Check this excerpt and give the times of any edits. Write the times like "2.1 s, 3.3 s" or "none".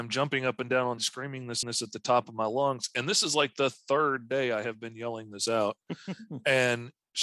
1.0 s, 1.6 s